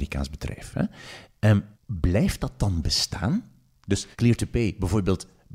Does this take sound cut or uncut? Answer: cut